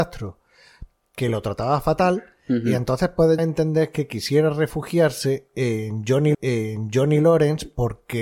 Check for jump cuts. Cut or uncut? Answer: cut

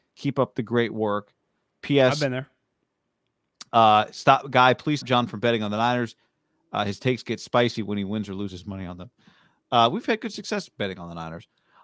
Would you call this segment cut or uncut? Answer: cut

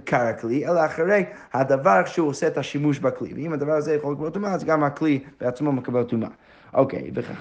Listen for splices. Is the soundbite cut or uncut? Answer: uncut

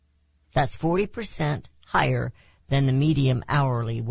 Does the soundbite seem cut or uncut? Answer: uncut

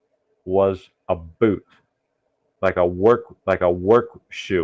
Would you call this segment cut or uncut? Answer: cut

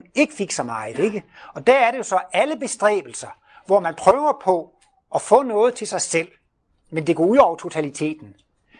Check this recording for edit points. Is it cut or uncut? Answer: uncut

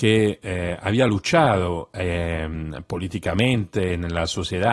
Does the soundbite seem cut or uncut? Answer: uncut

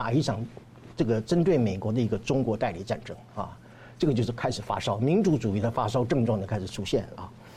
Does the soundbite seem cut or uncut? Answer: uncut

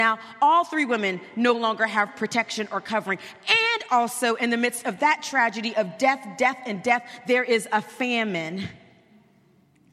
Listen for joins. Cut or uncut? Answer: uncut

